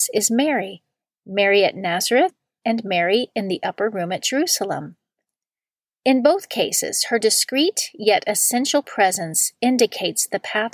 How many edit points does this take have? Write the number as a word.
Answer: zero